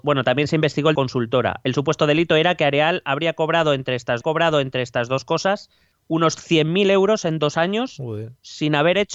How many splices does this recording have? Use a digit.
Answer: 3